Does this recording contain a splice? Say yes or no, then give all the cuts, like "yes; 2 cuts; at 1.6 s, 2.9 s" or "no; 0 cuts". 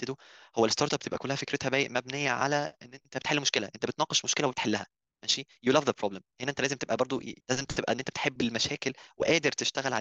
yes; 1 cut; at 7.4 s